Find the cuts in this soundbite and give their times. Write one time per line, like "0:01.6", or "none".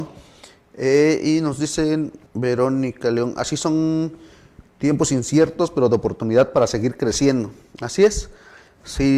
0:02.3
0:04.7

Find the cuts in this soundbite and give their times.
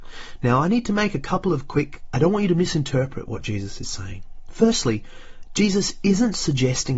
0:02.1

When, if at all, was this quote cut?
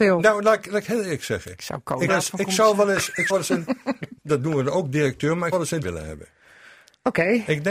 0:02.1
0:03.3
0:04.2
0:05.5
0:05.8

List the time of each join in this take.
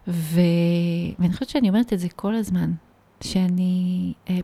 none

